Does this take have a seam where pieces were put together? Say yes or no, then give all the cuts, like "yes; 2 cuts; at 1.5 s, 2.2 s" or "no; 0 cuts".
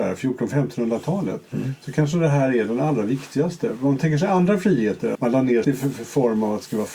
yes; 2 cuts; at 5.1 s, 5.6 s